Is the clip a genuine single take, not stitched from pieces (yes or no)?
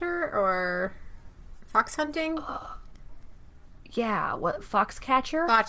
yes